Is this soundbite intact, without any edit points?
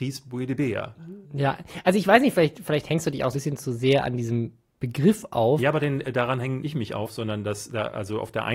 no; 3 cuts; at 1.2 s, 3.3 s, 6.6 s

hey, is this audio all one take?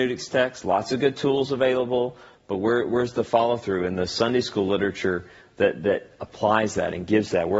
yes; 0 cuts

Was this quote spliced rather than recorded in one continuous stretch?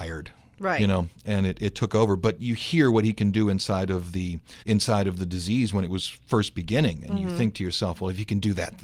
yes; 1 cut; at 4.6 s

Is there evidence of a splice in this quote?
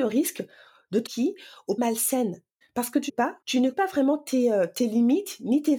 yes; 6 cuts; at 1.1 s, 1.8 s, 2.6 s, 3.1 s, 3.4 s, 3.7 s

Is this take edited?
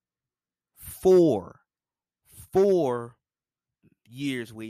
no; 0 cuts

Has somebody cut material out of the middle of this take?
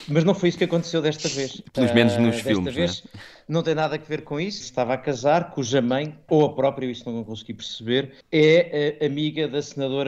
yes; 3 cuts; at 4.6 s, 6.3 s, 8.2 s

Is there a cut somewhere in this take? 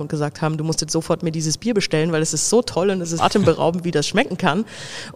yes; 1 cut; at 3.2 s

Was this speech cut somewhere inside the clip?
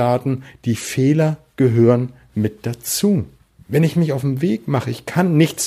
yes; 1 cut; at 3.4 s

